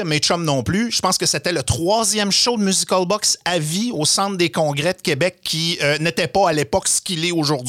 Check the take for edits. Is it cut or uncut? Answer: uncut